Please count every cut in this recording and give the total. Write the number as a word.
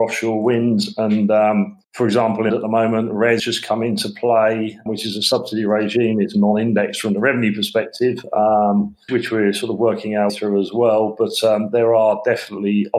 six